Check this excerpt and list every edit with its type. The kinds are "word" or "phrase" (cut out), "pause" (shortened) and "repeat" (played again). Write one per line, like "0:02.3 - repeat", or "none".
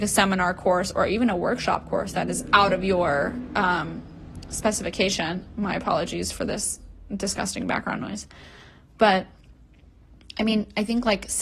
none